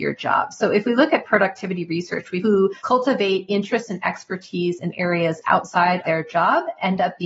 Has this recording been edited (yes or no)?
yes